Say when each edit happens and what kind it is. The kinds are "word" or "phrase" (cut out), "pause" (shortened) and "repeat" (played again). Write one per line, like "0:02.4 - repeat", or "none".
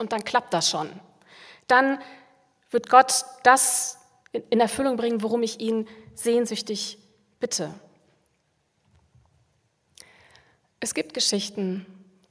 none